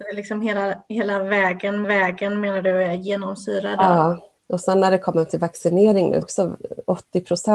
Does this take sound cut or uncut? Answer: cut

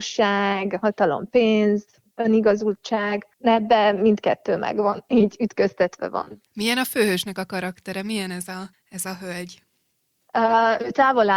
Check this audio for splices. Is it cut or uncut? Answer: cut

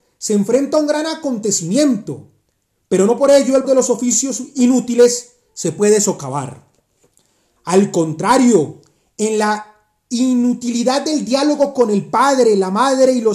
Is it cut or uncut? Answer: cut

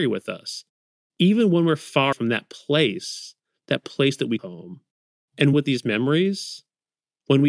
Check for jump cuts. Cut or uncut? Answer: cut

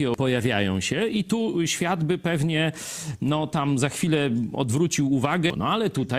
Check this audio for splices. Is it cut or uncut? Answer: uncut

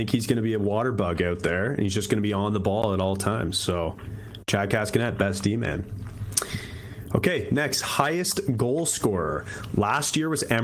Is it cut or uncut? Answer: uncut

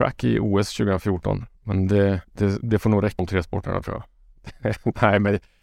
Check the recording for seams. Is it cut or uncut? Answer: cut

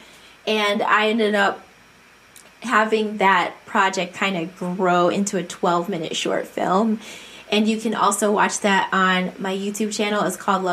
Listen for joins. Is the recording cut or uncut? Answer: uncut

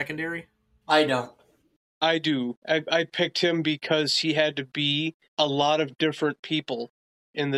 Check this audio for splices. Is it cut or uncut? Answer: cut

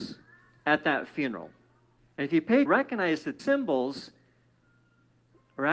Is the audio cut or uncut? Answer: cut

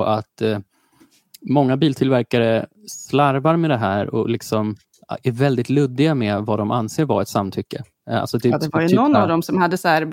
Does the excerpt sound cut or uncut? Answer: uncut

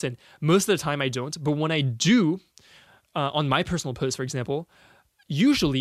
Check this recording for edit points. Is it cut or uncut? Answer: uncut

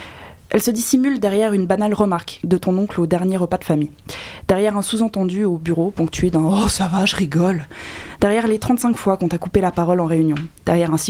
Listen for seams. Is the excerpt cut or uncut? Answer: uncut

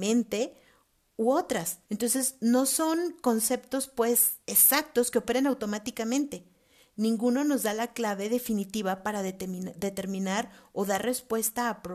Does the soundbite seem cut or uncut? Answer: cut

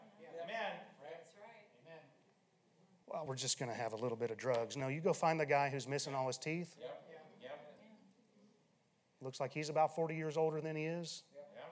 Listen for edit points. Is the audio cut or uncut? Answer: uncut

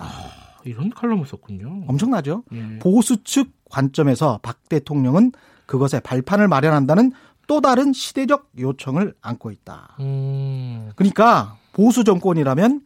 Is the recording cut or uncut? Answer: uncut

